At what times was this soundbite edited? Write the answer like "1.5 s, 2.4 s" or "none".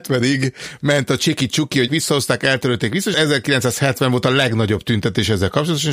1.9 s, 3.1 s